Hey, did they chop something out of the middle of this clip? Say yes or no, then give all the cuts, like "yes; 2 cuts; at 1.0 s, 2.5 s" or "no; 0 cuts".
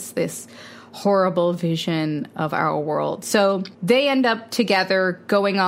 yes; 1 cut; at 3.7 s